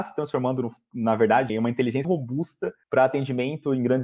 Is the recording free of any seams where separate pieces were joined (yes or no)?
no